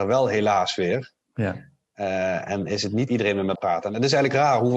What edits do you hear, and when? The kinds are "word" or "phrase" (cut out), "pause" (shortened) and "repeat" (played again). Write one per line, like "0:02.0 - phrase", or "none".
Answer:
0:02.5 - word
0:03.1 - word
0:03.5 - word